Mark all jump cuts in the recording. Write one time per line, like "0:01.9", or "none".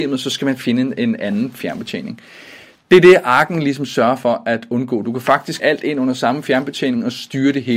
0:05.6